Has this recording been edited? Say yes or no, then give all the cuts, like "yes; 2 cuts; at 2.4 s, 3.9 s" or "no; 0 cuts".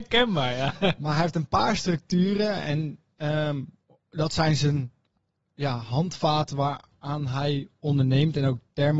no; 0 cuts